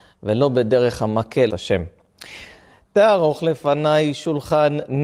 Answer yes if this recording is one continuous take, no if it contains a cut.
no